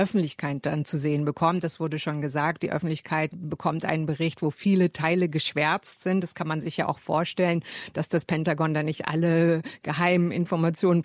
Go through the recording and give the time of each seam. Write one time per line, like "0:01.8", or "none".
none